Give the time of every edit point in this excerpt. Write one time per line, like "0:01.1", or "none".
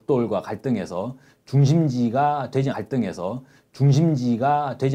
0:02.7

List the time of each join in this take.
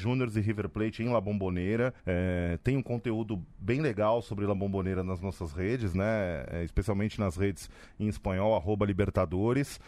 0:02.0

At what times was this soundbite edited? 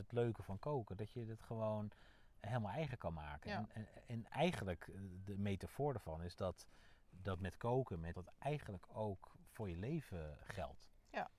0:08.1
0:10.4

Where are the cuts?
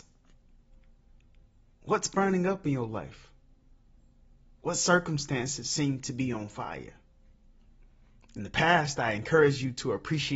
none

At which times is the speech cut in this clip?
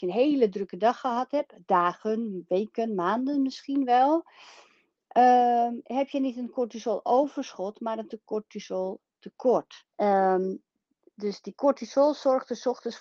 0:05.8
0:09.9

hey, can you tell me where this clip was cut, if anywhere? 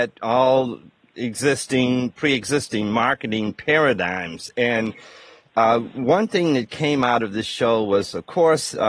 none

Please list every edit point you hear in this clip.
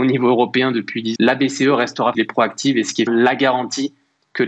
0:01.2
0:02.1
0:03.1

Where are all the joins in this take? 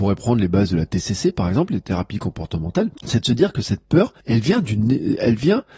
0:03.0
0:04.2

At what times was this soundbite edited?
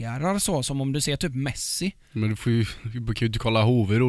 0:02.0

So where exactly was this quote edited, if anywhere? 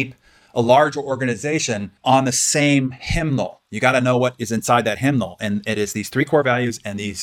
0:02.0

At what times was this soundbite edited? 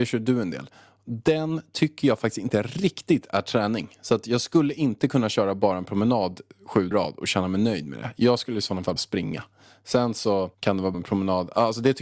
0:06.9
0:09.0
0:10.5
0:10.9

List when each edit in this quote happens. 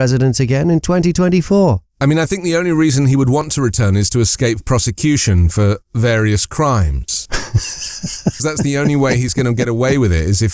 0:01.9
0:05.8
0:08.4

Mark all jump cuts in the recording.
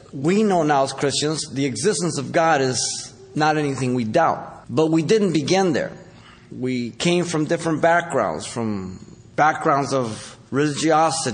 0:04.6

